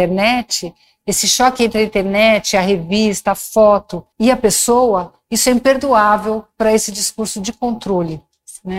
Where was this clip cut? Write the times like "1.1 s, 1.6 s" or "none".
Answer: 4.1 s